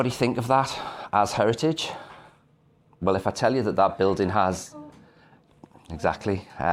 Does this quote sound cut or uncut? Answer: uncut